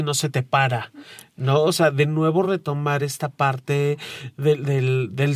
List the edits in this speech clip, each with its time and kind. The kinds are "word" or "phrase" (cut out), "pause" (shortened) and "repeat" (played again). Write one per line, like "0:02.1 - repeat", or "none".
none